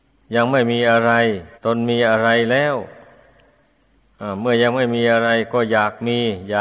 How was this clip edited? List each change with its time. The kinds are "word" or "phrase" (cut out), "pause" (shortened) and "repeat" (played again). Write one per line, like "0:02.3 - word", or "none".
0:01.6 - pause